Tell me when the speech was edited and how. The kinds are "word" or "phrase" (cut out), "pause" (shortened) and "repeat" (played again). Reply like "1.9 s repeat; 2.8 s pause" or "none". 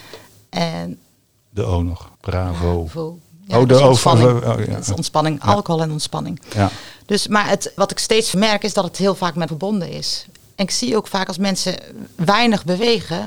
2.1 s pause; 7.8 s word; 8.3 s word; 9.5 s word